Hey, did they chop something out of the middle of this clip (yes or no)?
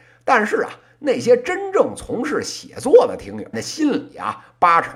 yes